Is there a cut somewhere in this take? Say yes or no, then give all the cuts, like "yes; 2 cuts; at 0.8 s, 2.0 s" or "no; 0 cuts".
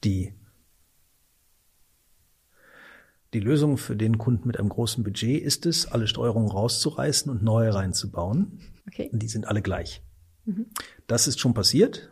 yes; 1 cut; at 8.8 s